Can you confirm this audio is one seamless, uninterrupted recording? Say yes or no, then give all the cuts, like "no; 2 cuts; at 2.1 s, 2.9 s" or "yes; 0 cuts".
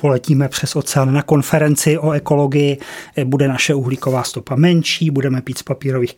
yes; 0 cuts